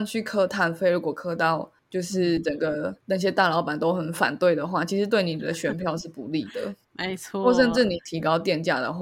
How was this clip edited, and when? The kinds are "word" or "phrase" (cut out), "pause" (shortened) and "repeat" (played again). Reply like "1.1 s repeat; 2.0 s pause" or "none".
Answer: 3.0 s pause